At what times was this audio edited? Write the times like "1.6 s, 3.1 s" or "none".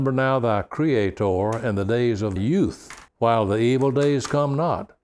2.4 s, 3.1 s